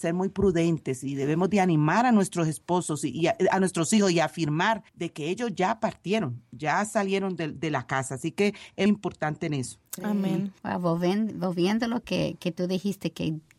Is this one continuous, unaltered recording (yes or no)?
no